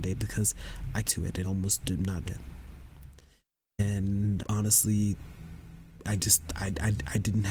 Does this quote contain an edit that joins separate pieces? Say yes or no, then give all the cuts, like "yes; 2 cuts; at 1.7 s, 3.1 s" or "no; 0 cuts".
yes; 5 cuts; at 1.0 s, 1.4 s, 2.3 s, 4.4 s, 6.0 s